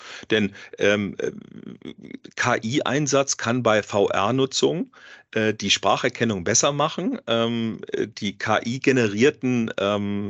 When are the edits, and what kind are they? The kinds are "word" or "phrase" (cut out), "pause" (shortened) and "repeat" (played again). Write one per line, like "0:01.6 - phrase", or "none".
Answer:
none